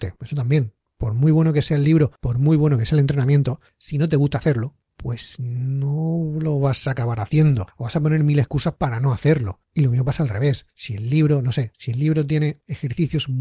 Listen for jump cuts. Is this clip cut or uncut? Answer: cut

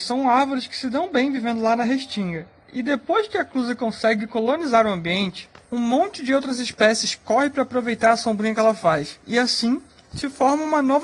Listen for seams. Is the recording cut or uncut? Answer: uncut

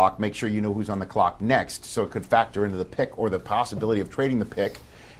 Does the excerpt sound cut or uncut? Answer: cut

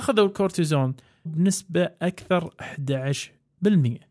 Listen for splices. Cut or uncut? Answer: cut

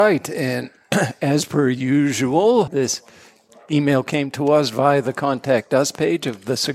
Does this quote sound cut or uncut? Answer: cut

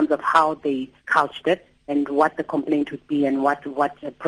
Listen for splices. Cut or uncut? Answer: cut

